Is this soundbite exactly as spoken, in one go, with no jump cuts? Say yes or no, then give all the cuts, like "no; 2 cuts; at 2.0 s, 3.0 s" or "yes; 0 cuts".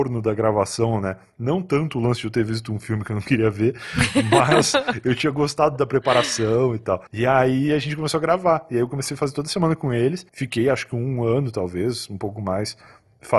no; 2 cuts; at 7.1 s, 10.3 s